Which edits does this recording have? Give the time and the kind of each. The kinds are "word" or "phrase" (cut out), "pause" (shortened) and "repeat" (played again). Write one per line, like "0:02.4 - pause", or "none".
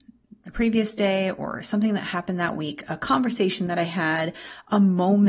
none